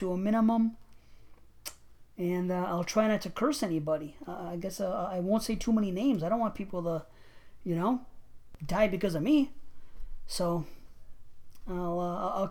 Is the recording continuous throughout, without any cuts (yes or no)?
yes